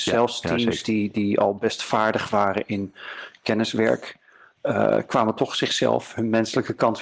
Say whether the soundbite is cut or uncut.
cut